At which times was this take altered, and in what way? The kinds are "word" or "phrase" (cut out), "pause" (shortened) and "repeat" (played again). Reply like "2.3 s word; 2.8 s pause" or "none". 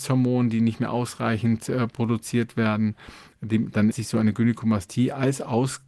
3.9 s word